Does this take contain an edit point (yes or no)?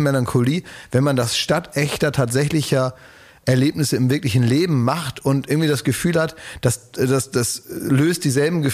no